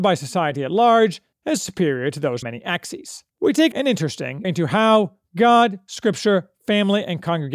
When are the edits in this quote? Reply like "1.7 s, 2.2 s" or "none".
1.3 s, 2.4 s, 3.3 s, 3.7 s, 4.4 s